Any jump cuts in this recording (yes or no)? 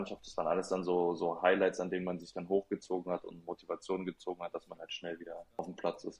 no